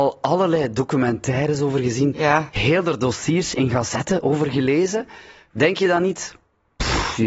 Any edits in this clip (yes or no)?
no